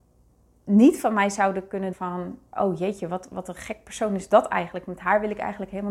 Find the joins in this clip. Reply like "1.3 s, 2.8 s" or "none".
1.9 s